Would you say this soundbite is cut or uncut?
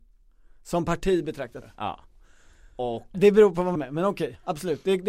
cut